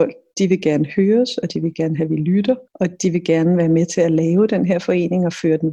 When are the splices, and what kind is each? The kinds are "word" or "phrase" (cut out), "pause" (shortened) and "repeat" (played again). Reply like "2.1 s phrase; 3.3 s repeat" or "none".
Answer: 2.7 s pause

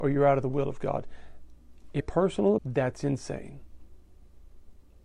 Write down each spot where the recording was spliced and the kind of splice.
2.0 s word; 2.6 s word

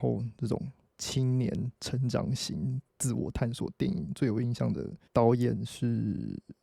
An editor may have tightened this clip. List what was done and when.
5.1 s pause

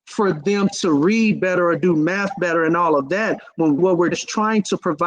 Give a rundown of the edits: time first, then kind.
3.8 s word; 4.1 s word

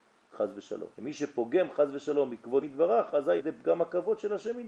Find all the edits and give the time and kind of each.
0.9 s pause; 2.6 s word; 3.4 s word

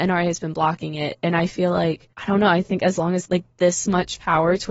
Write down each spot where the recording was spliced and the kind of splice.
3.2 s phrase

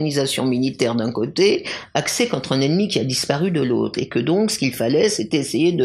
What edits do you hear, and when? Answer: none

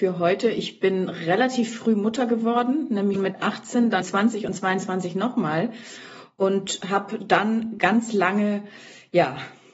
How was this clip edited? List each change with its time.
3.2 s word; 4.0 s word

